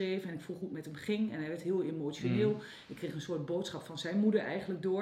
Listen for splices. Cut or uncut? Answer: uncut